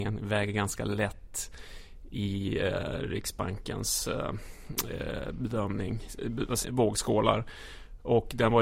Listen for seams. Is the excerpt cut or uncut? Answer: cut